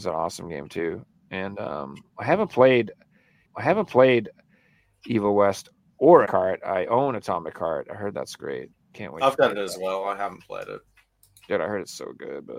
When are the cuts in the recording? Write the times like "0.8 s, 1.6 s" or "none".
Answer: 3.4 s, 6.2 s